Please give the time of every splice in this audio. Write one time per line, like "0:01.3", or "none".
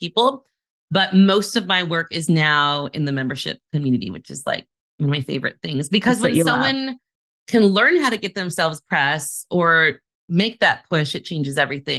none